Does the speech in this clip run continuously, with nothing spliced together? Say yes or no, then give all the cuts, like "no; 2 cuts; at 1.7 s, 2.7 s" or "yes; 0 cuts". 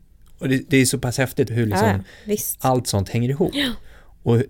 no; 1 cut; at 1.5 s